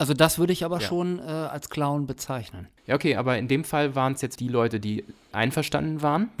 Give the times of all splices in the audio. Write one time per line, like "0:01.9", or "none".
0:02.8
0:04.4
0:05.3